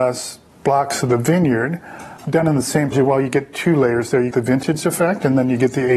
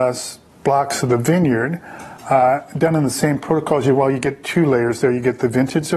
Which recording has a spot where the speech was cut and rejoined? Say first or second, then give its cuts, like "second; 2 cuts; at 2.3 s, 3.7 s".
first; 3 cuts; at 2.2 s, 2.9 s, 4.3 s